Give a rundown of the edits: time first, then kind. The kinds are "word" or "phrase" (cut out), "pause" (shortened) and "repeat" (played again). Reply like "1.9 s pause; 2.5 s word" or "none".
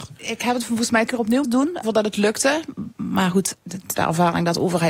1.1 s word; 1.4 s word; 1.8 s word; 3.5 s word; 4.0 s phrase